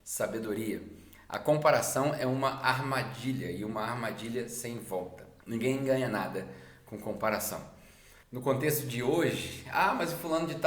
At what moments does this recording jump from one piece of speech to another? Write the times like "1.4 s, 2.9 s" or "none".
5.4 s, 8.2 s